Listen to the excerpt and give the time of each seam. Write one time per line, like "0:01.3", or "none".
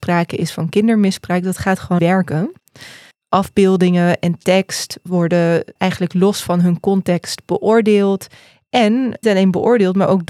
0:02.0
0:05.8
0:09.2